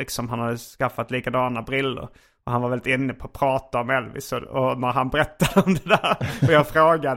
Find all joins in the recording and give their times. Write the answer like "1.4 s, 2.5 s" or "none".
none